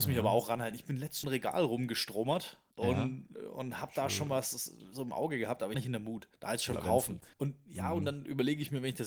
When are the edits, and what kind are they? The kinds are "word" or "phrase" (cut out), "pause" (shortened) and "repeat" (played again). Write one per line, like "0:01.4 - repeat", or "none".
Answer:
0:01.2 - phrase
0:02.7 - pause
0:05.7 - phrase
0:06.4 - pause
0:06.7 - word
0:07.3 - pause